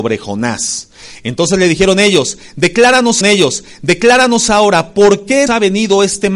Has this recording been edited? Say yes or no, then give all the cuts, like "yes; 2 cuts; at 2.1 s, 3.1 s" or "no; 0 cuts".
yes; 2 cuts; at 3.2 s, 5.5 s